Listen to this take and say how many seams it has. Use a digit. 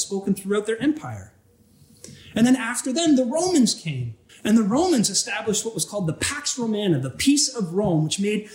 1